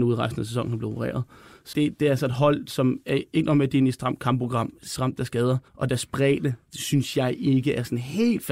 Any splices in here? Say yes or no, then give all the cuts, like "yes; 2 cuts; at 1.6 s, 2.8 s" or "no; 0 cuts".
yes; 3 cuts; at 1.7 s, 5.0 s, 5.7 s